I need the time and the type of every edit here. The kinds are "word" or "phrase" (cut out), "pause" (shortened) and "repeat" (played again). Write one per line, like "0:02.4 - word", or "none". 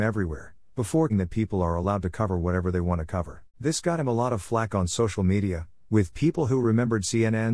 0:01.1 - word
0:03.5 - pause